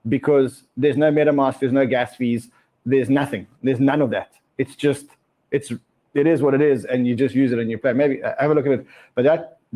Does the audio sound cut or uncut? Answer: uncut